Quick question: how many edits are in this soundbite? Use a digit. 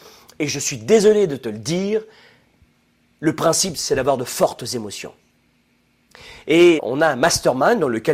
1